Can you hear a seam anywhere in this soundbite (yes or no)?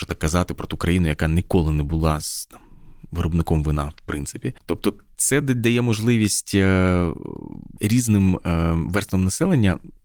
no